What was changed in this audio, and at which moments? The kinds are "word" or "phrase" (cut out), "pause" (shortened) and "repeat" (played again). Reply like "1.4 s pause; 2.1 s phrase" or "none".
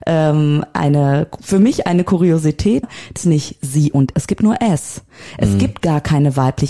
2.8 s word; 3.2 s phrase; 4.1 s word